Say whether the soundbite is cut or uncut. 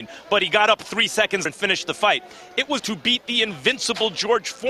cut